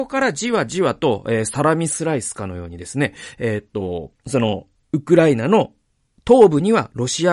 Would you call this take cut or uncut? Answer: cut